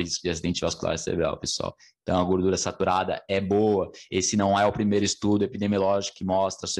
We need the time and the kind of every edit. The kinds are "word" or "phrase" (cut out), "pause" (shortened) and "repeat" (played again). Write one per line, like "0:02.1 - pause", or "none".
none